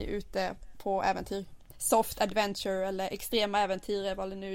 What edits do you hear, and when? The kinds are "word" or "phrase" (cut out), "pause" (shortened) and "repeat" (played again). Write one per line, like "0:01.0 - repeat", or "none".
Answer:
none